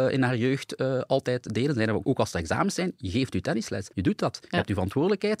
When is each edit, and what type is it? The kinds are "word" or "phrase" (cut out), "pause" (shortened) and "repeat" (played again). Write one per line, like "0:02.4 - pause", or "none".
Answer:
0:02.0 - word
0:03.9 - pause